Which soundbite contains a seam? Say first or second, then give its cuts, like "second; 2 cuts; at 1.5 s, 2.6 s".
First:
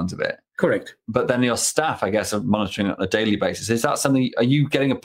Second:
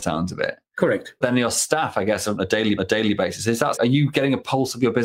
second; 4 cuts; at 1.2 s, 2.4 s, 2.8 s, 3.7 s